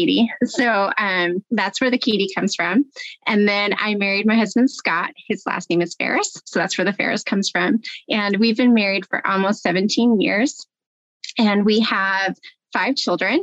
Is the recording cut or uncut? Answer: uncut